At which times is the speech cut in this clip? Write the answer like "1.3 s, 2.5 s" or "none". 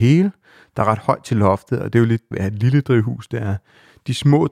2.3 s

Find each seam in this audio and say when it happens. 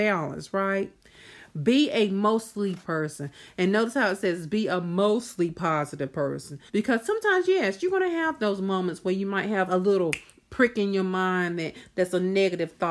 2.8 s, 6.7 s, 9.7 s

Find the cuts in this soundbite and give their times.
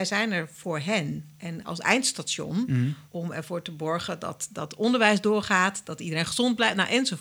3.1 s

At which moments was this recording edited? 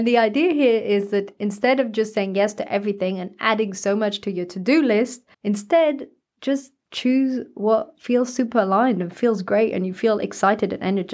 5.3 s, 6.8 s

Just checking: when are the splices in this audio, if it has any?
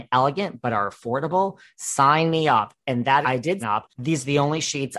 3.2 s, 3.6 s

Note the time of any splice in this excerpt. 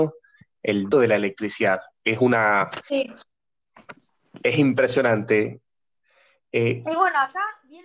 0.9 s

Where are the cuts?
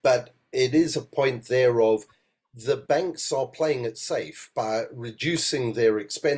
none

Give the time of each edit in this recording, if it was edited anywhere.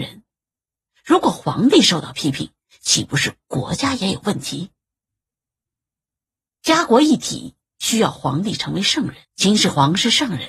9.2 s

